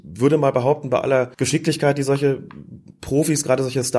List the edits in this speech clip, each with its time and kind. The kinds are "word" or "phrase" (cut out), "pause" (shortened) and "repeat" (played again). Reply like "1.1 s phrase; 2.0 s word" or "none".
1.3 s pause